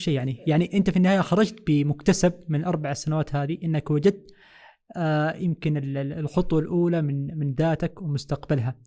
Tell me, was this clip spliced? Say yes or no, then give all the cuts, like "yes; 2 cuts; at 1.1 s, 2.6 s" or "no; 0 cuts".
no; 0 cuts